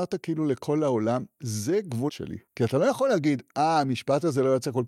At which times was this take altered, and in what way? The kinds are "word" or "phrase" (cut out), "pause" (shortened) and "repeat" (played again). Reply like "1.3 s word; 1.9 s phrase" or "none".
2.1 s word